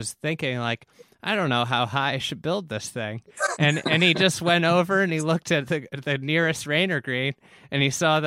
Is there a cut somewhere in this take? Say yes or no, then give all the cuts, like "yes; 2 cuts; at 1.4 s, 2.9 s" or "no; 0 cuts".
no; 0 cuts